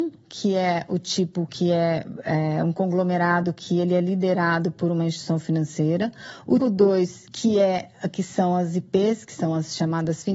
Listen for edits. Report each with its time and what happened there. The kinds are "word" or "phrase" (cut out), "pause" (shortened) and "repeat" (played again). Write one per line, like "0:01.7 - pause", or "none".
0:06.6 - word